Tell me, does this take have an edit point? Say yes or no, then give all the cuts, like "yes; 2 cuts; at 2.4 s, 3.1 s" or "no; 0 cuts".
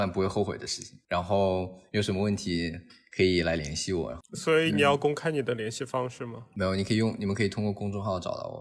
no; 0 cuts